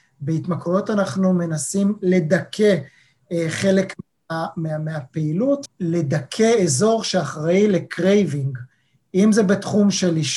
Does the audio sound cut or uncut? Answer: uncut